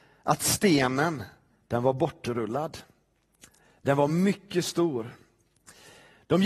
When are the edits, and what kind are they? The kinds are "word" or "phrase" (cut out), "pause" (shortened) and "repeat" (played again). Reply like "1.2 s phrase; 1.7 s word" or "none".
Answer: none